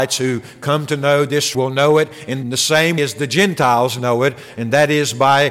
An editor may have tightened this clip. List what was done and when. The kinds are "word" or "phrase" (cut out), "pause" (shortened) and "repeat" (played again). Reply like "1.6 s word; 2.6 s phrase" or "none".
1.5 s word; 2.4 s phrase; 3.0 s word